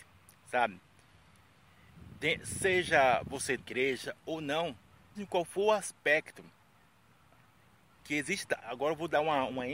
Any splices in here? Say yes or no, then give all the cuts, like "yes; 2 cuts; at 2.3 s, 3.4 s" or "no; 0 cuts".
yes; 4 cuts; at 3.6 s, 5.1 s, 8.0 s, 8.6 s